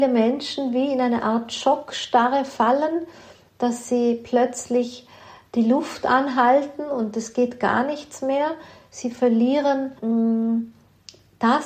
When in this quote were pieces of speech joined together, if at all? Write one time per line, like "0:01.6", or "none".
0:10.0

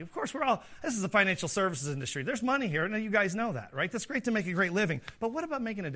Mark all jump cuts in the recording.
none

